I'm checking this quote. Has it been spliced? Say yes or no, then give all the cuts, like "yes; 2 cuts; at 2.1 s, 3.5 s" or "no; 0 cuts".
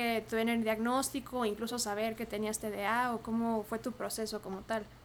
no; 0 cuts